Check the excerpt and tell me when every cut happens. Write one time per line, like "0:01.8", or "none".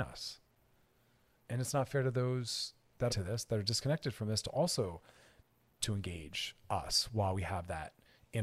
0:03.1
0:05.8